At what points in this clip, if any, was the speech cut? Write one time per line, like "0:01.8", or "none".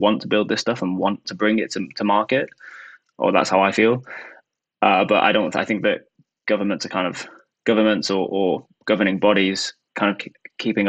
0:01.2
0:08.3